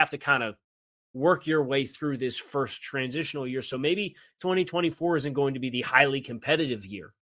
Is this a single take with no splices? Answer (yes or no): yes